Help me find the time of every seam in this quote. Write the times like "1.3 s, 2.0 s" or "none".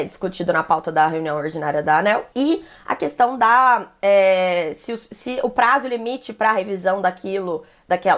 2.3 s